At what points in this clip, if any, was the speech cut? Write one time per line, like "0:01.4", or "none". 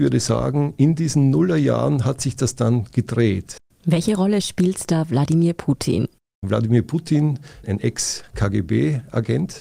none